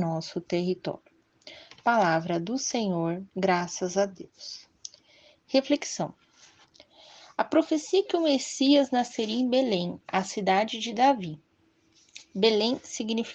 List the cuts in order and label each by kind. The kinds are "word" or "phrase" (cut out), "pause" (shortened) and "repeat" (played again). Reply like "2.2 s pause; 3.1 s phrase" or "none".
3.3 s pause